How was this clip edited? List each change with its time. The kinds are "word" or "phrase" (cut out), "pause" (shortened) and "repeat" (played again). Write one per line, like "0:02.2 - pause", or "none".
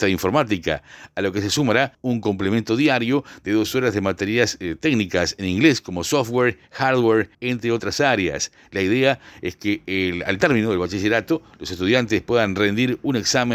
0:01.9 - pause
0:07.3 - pause